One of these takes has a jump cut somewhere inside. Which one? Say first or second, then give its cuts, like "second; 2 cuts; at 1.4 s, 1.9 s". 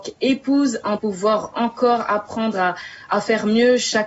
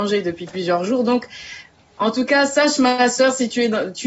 first; 2 cuts; at 1.0 s, 1.5 s